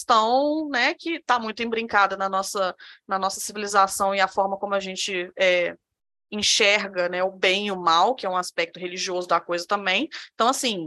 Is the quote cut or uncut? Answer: uncut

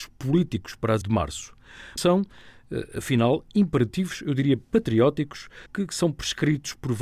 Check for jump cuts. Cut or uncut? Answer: cut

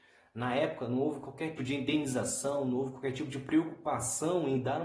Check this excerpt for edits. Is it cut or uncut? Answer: cut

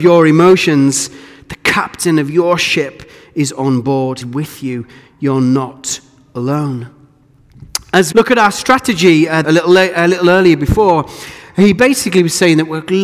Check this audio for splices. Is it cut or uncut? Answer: cut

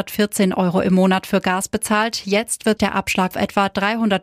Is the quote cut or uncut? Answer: cut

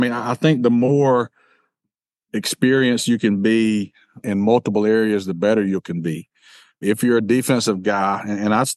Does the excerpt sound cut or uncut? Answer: uncut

